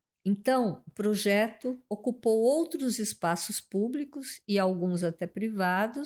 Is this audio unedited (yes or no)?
yes